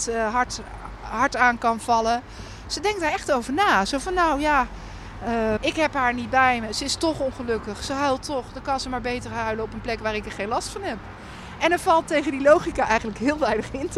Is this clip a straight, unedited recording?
no; 1 cut; at 5.6 s

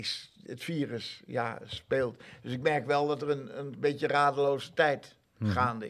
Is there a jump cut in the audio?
no; 0 cuts

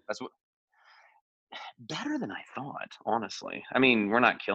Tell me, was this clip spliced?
no; 0 cuts

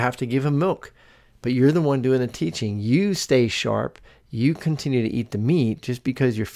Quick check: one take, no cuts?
yes; 0 cuts

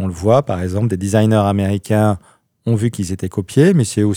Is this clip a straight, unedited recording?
yes; 0 cuts

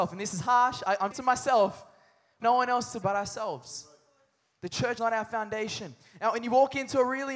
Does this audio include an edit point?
yes; 4 cuts; at 1.1 s, 2.4 s, 3.0 s, 5.0 s

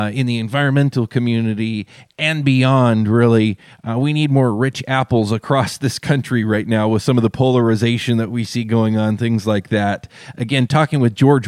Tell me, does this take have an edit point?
no; 0 cuts

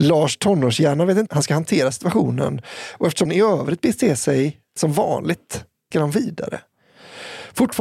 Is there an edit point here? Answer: yes; 4 cuts; at 1.3 s, 3.2 s, 4.8 s, 5.9 s

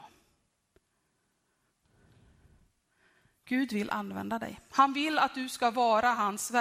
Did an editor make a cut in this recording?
no; 0 cuts

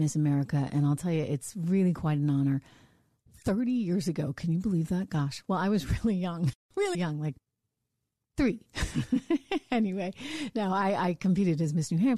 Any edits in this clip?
yes; 2 cuts; at 6.9 s, 8.2 s

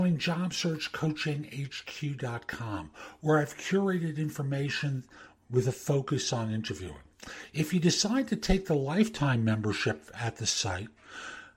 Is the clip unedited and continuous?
yes; 0 cuts

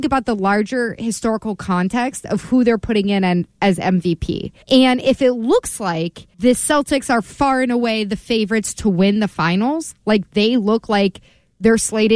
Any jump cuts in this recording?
yes; 2 cuts; at 4.6 s, 6.3 s

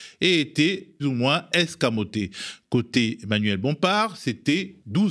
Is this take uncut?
no; 1 cut; at 1.0 s

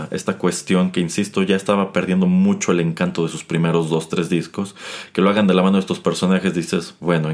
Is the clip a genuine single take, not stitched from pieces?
yes; 0 cuts

